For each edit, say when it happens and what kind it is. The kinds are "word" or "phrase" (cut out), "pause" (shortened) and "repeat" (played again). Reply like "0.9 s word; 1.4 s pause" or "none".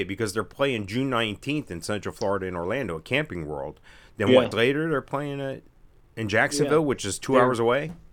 4.5 s phrase